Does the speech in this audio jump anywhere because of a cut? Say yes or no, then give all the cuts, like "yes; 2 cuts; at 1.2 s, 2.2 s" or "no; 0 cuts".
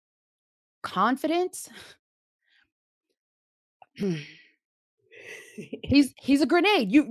no; 0 cuts